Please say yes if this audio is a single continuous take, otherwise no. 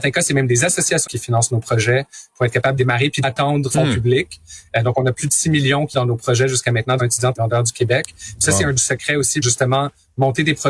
no